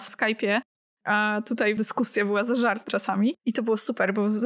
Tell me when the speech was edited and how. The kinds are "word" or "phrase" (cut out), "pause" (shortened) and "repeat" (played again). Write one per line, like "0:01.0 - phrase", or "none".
0:01.8 - word
0:02.9 - phrase
0:03.4 - pause